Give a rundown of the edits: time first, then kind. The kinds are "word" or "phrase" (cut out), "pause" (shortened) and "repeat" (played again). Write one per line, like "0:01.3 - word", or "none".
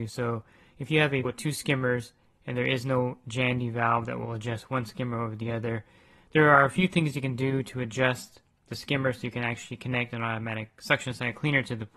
0:01.2 - word